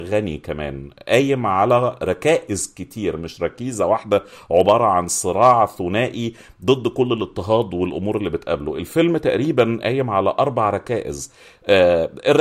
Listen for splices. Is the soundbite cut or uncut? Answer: uncut